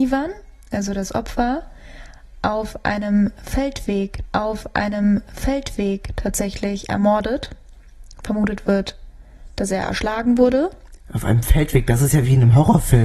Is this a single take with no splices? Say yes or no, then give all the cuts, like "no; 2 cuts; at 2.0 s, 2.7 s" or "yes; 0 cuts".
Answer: no; 1 cut; at 4.3 s